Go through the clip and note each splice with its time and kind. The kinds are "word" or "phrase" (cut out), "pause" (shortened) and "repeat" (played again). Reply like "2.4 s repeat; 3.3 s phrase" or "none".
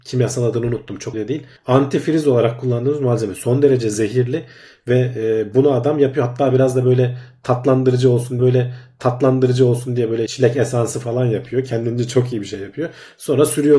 1.1 s word; 1.6 s pause; 8.4 s repeat; 10.3 s word